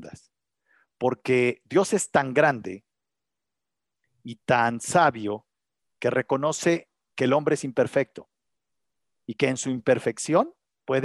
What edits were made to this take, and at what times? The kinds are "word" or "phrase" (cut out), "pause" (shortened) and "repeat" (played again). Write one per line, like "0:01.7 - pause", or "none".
none

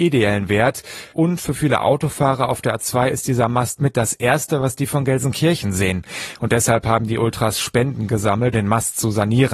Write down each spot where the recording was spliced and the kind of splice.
0:08.5 - word

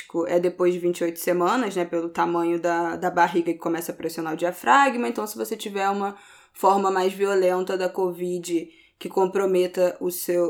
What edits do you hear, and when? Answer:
none

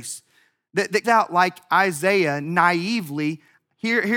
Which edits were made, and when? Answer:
0:01.0 - word

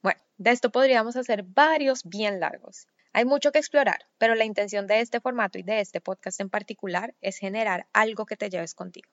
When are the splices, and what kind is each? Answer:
0:02.0 - word

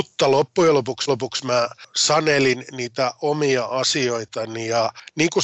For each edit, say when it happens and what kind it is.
0:01.1 - repeat

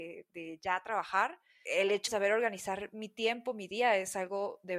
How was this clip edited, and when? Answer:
0:01.7 - word
0:02.1 - word

